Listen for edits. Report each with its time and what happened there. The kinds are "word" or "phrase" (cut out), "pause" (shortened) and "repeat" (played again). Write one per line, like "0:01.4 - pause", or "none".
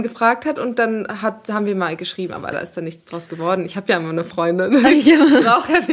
none

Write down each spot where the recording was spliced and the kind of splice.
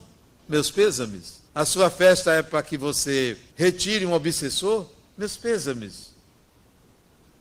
0:01.5 - pause
0:03.5 - pause

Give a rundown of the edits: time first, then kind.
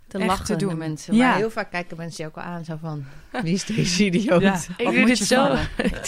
none

